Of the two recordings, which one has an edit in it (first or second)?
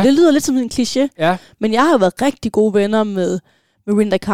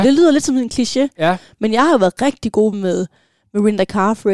second